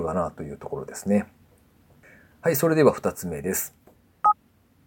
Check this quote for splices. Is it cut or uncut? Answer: uncut